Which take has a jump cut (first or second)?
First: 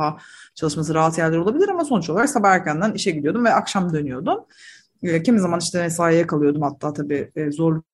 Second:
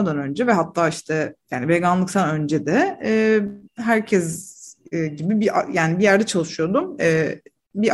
second